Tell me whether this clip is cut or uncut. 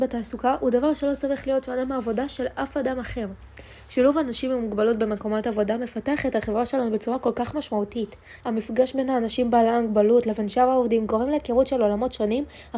cut